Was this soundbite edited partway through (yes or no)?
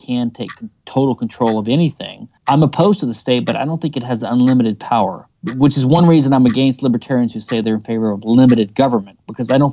no